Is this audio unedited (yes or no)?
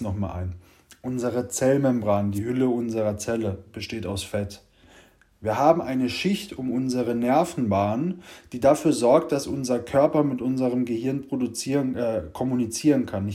yes